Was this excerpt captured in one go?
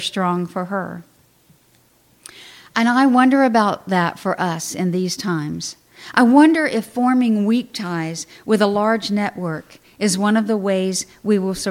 yes; 0 cuts

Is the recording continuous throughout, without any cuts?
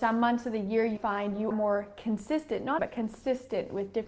no; 3 cuts; at 1.0 s, 1.5 s, 2.8 s

